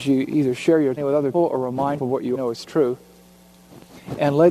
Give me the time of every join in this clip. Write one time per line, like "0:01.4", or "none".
0:01.0
0:01.3
0:02.0
0:02.3